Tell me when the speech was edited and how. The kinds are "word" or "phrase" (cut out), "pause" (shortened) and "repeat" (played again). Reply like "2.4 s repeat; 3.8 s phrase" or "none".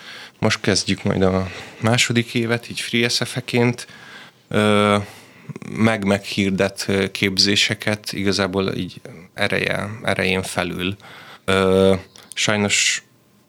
11.4 s pause